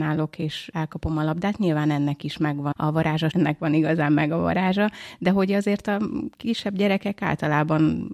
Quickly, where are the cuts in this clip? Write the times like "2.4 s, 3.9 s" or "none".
2.7 s, 3.3 s